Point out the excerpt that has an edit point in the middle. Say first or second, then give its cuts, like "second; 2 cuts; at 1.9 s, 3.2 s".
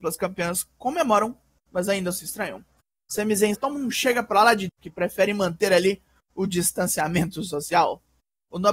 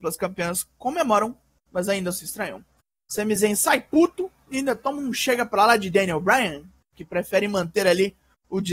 first; 2 cuts; at 3.5 s, 4.7 s